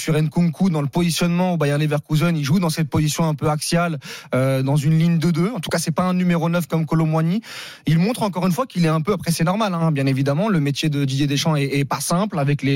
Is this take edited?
no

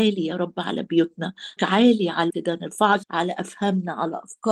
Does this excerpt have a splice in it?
yes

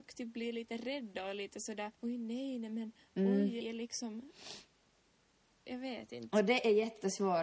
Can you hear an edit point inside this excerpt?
yes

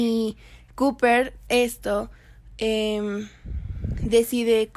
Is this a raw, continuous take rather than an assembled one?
no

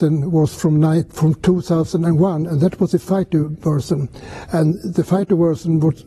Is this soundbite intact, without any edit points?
yes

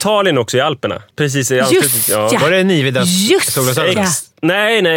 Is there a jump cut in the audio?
yes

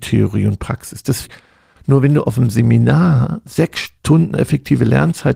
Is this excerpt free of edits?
no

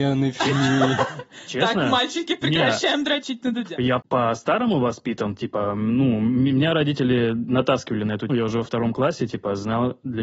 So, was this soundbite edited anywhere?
yes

